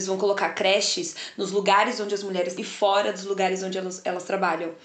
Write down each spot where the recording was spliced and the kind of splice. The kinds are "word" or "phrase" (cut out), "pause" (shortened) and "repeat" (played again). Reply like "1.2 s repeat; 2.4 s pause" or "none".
2.6 s word